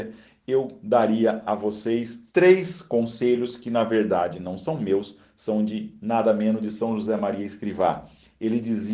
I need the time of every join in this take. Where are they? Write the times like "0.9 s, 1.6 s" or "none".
none

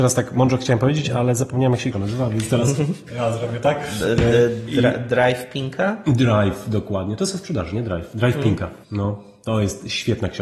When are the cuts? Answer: 1.9 s, 8.8 s

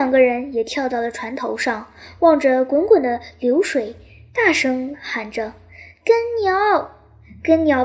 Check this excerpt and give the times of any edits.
none

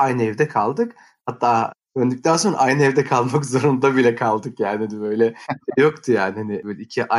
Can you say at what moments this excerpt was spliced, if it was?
none

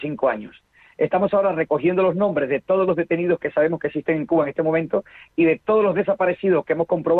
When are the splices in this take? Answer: none

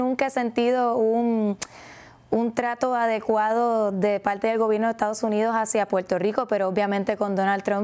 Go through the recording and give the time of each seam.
none

